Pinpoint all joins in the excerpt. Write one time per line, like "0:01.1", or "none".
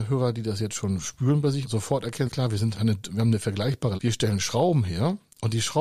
0:01.6
0:02.3
0:02.7
0:04.0

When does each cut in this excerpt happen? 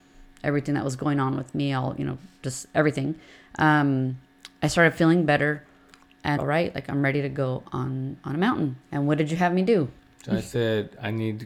0:06.4
0:08.8
0:10.0

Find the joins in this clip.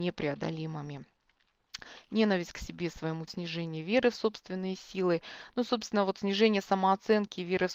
0:03.3

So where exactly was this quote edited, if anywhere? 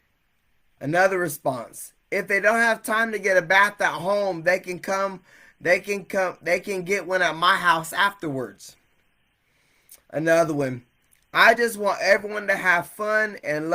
none

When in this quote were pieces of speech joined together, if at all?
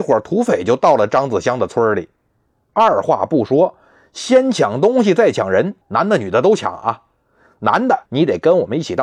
0:05.8
0:08.1

